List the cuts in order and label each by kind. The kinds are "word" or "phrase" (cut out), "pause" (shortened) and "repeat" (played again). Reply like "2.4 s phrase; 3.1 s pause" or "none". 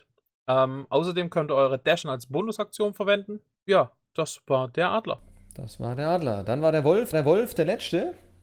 2.0 s word; 4.1 s word; 7.1 s repeat